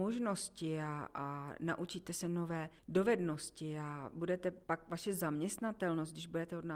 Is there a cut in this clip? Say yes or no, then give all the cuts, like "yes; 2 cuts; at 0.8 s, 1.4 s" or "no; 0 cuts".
yes; 1 cut; at 4.6 s